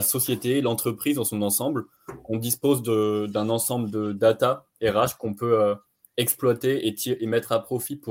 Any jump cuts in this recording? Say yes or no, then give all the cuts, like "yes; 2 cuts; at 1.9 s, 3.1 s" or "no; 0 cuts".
no; 0 cuts